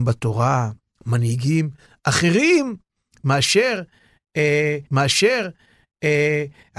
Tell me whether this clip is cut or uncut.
cut